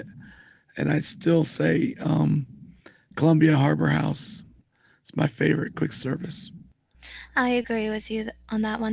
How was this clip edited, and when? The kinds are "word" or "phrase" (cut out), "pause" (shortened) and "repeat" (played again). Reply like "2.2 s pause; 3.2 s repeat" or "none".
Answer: none